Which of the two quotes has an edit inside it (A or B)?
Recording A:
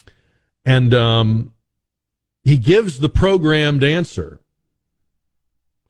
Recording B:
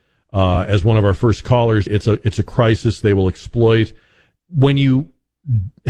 B